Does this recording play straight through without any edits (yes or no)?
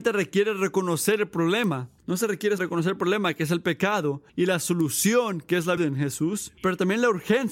no